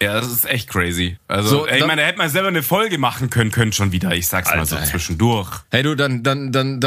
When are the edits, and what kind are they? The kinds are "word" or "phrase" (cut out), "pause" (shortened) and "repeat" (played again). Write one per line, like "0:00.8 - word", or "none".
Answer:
0:03.5 - repeat
0:05.6 - pause